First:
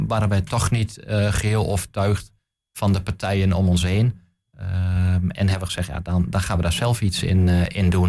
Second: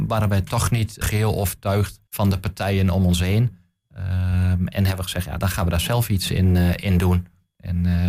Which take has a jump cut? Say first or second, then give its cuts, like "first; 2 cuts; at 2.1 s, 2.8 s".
second; 3 cuts; at 1.0 s, 2.1 s, 5.4 s